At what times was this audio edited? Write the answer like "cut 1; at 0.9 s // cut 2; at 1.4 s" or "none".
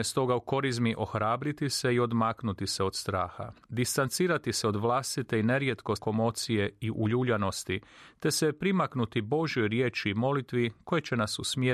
cut 1; at 3.6 s // cut 2; at 6.0 s